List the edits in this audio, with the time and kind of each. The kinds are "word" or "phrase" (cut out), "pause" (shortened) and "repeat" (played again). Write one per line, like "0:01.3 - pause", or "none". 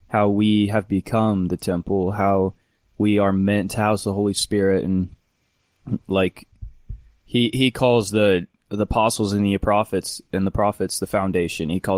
none